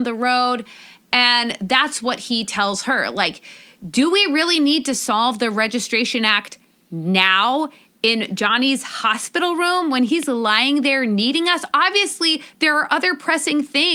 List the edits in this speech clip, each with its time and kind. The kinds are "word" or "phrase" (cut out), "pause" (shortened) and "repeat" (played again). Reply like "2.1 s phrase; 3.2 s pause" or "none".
none

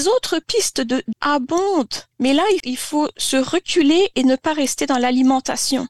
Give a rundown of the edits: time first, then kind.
1.1 s word; 2.1 s pause; 2.6 s word

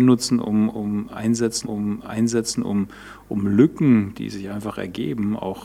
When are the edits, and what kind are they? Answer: 1.6 s repeat

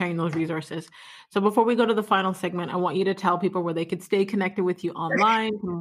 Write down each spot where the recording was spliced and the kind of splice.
none

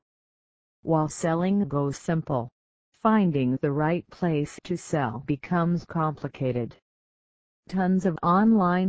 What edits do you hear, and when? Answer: 5.9 s word

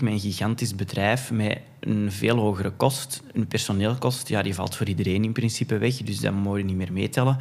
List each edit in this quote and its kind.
none

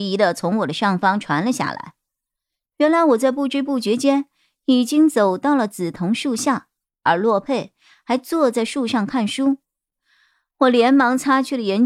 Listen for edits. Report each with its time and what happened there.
6.8 s pause

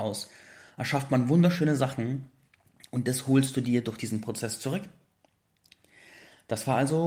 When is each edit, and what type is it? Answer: none

